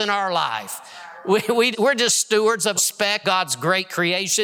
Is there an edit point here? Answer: yes; 3 cuts; at 1.7 s, 2.8 s, 3.2 s

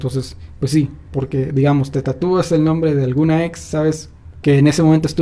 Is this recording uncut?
yes; 0 cuts

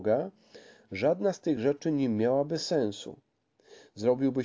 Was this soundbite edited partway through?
no; 0 cuts

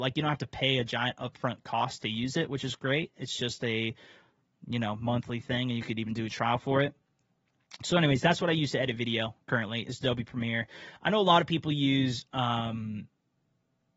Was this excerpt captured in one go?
yes; 0 cuts

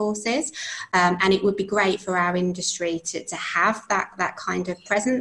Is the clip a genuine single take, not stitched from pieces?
yes; 0 cuts

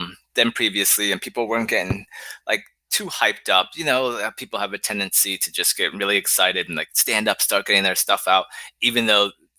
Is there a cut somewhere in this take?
no; 0 cuts

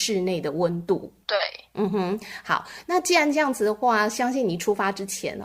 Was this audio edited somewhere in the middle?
no; 0 cuts

